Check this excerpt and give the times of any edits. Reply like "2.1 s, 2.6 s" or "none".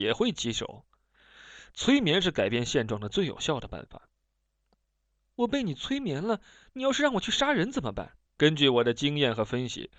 8.3 s